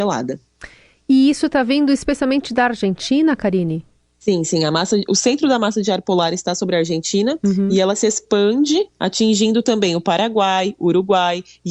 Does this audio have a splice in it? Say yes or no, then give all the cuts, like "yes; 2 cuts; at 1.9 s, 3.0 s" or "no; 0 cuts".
no; 0 cuts